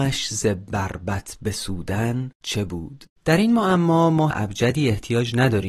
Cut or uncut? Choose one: cut